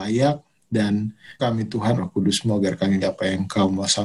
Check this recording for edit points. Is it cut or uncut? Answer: cut